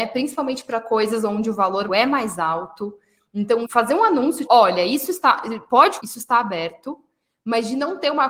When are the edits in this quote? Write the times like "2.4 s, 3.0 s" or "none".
1.9 s, 3.6 s, 4.5 s, 6.0 s